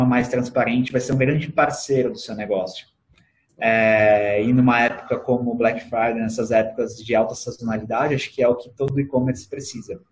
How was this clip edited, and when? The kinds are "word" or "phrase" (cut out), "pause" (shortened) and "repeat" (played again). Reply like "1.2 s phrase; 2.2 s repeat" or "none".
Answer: none